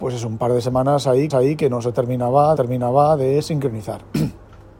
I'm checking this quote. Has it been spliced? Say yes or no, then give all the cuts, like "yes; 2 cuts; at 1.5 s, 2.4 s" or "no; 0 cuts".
yes; 2 cuts; at 1.3 s, 2.6 s